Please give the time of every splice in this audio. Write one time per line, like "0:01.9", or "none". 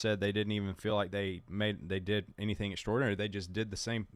none